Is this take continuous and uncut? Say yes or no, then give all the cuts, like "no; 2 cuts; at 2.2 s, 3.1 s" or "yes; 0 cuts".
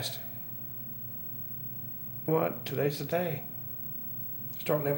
no; 1 cut; at 2.3 s